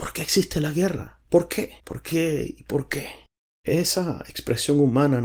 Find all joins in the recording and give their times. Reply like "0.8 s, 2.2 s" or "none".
1.3 s, 1.8 s, 3.3 s